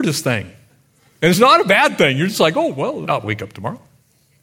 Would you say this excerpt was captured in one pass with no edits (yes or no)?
no